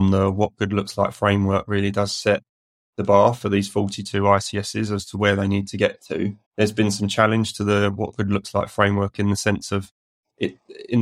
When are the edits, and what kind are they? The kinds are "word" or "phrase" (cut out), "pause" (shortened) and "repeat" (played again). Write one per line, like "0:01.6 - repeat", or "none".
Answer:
0:06.4 - pause